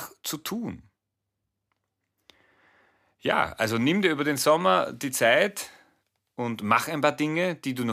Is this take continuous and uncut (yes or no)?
yes